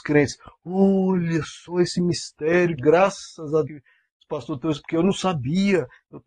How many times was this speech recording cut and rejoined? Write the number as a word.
two